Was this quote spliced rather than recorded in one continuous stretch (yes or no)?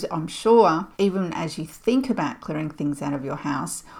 yes